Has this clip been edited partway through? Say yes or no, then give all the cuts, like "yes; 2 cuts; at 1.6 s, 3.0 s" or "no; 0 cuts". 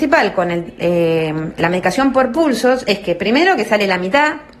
no; 0 cuts